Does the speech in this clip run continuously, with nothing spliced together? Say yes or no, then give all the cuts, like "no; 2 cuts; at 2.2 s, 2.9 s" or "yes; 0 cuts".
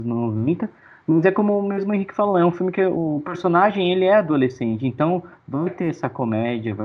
yes; 0 cuts